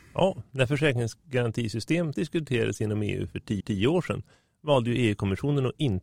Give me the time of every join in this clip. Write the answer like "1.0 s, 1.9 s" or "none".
2.1 s, 3.6 s